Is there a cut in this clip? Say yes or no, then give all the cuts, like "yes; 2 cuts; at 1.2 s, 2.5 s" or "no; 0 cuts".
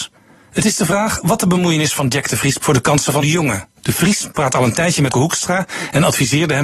yes; 4 cuts; at 2.6 s, 3.2 s, 3.8 s, 5.1 s